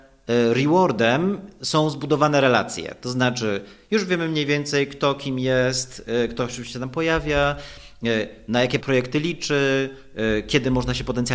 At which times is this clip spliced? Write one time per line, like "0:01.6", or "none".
0:08.8